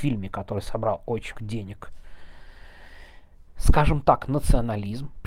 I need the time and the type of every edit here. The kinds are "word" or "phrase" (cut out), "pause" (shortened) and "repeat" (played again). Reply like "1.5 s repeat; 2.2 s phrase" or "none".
1.3 s word